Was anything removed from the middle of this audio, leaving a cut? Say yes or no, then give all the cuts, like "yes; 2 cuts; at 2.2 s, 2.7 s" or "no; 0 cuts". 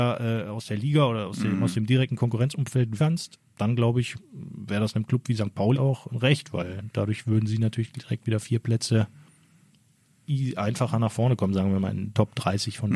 yes; 3 cuts; at 3.0 s, 5.7 s, 6.1 s